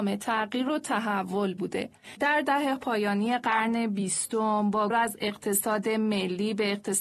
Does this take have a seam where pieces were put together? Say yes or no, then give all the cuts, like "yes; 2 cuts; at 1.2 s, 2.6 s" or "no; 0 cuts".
yes; 2 cuts; at 2.8 s, 4.9 s